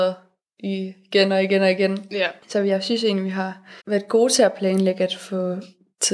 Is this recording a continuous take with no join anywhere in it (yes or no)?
no